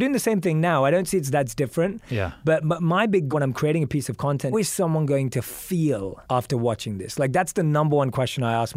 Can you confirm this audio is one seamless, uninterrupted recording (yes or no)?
no